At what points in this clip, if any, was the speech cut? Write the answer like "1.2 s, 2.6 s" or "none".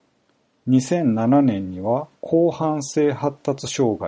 2.2 s